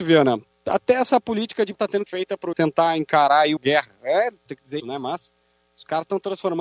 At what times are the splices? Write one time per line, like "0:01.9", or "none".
0:01.7
0:02.1
0:02.5
0:03.6
0:04.5
0:04.8